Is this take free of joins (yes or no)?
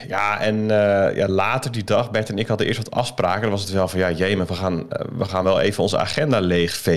yes